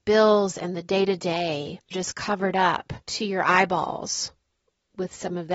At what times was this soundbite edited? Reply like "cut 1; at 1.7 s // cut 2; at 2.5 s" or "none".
cut 1; at 1.9 s // cut 2; at 3.0 s